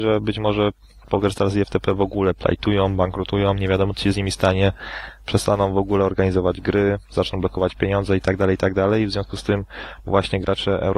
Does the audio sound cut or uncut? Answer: uncut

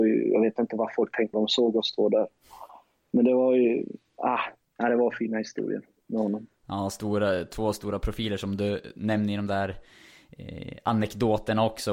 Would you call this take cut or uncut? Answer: cut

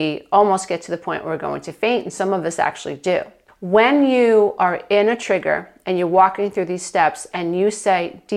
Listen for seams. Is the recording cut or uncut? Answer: cut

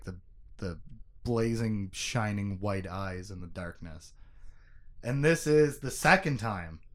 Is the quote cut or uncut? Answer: uncut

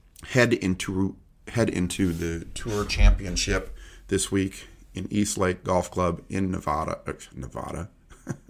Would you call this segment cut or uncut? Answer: uncut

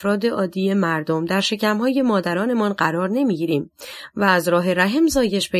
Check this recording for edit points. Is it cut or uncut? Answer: uncut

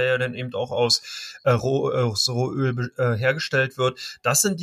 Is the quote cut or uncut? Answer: uncut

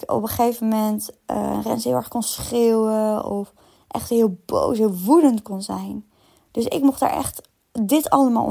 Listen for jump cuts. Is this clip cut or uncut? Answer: uncut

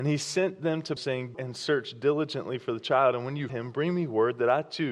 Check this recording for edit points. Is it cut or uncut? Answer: cut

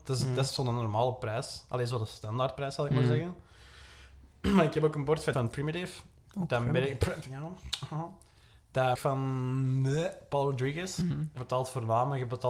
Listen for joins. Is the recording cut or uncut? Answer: cut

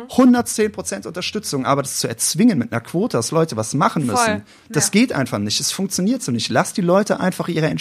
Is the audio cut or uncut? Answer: uncut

